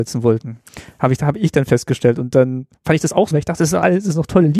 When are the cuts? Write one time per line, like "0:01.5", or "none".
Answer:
0:03.3